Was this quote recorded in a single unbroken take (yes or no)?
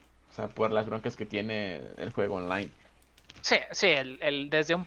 yes